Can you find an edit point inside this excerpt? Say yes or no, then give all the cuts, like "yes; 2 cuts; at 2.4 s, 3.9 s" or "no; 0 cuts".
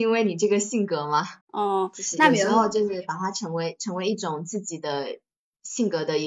yes; 1 cut; at 1.4 s